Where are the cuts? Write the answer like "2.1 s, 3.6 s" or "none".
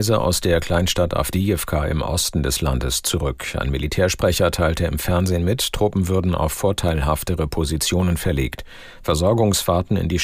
none